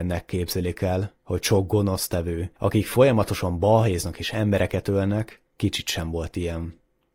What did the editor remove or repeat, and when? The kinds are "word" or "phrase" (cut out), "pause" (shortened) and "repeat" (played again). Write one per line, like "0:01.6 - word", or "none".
0:01.2 - pause
0:02.6 - pause
0:05.5 - pause